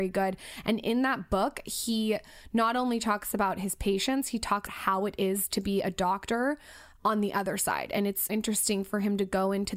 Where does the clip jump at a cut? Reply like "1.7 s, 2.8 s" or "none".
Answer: 4.7 s, 8.3 s